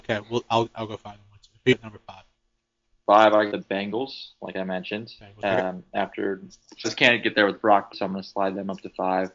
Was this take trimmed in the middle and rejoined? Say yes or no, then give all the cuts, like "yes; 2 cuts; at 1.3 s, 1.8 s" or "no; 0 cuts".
yes; 4 cuts; at 1.7 s, 3.5 s, 6.8 s, 7.9 s